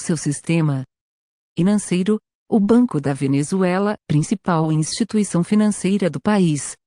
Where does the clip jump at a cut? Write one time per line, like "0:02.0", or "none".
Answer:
0:04.0